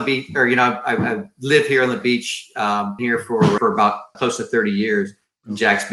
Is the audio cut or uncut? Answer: cut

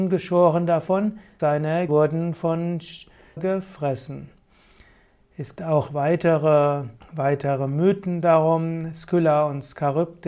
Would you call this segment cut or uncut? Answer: cut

